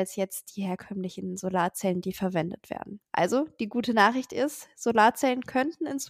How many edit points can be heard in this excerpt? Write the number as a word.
one